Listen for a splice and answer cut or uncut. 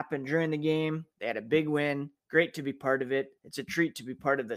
cut